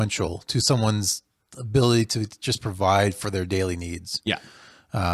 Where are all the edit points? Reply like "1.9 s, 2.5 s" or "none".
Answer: none